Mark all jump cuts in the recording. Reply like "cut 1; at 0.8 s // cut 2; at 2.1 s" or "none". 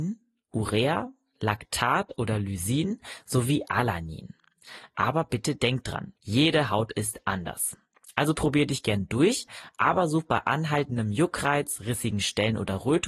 cut 1; at 6.2 s